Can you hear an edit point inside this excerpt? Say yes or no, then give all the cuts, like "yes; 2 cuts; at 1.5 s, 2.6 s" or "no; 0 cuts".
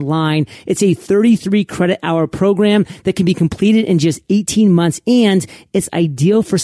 no; 0 cuts